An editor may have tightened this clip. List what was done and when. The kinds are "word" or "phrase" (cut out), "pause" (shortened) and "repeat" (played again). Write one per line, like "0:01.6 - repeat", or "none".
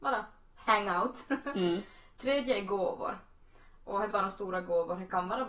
0:04.1 - word